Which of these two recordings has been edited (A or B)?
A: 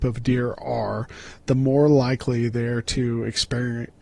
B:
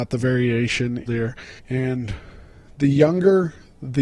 B